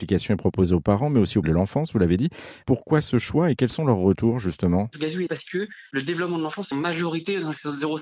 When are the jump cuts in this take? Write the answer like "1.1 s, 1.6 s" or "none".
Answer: 1.4 s, 5.3 s, 6.7 s